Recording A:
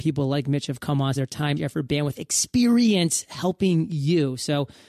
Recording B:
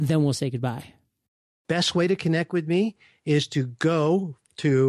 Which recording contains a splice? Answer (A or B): A